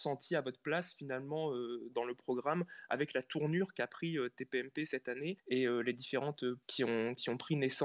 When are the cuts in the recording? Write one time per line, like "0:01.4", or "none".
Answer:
0:01.9
0:05.4
0:06.6

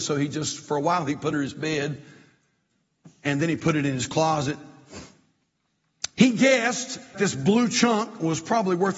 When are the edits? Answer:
0:01.3
0:06.1
0:07.1

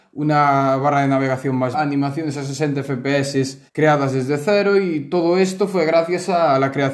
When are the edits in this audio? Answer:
0:01.7
0:03.7

